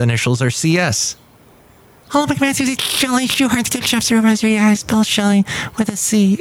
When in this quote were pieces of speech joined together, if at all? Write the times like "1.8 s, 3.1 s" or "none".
none